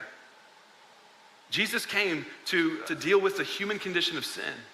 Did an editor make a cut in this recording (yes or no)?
yes